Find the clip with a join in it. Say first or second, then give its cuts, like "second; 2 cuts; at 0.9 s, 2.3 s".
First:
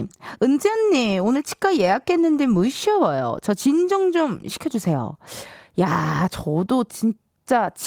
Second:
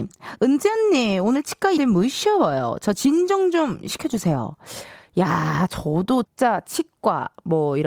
second; 2 cuts; at 1.8 s, 6.2 s